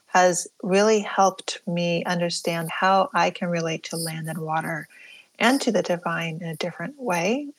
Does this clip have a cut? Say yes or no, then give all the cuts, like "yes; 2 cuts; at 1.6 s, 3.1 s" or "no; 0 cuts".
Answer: no; 0 cuts